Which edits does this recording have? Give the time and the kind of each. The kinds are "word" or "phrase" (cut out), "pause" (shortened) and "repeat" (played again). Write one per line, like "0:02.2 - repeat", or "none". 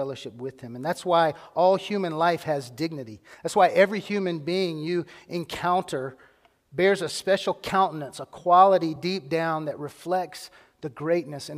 none